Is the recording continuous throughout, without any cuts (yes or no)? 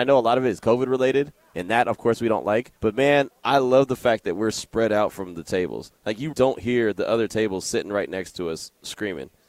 no